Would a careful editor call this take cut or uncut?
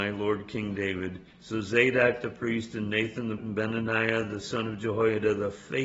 cut